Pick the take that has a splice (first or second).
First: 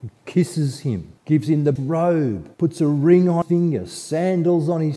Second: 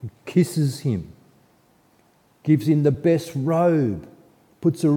first